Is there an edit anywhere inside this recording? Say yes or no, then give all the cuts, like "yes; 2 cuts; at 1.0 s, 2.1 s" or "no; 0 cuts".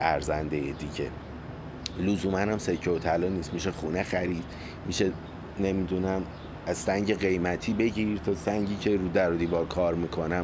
no; 0 cuts